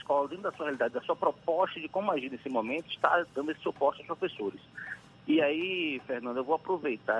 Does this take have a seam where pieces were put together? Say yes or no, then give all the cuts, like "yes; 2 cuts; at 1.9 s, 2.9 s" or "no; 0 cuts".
no; 0 cuts